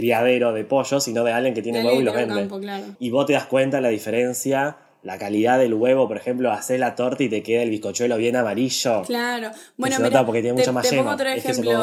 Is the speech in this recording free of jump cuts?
yes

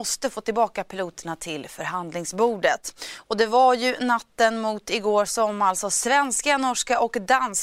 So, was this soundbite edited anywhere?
no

